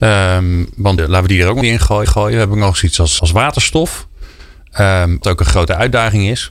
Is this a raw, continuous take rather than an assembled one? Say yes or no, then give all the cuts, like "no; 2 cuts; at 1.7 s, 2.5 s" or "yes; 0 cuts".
no; 5 cuts; at 1.0 s, 1.6 s, 2.0 s, 3.2 s, 5.2 s